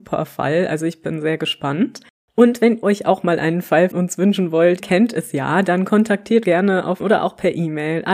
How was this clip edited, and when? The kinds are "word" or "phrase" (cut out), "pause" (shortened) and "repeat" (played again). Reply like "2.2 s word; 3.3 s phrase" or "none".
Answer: 2.8 s word; 3.9 s word; 4.8 s word; 6.4 s word; 7.0 s word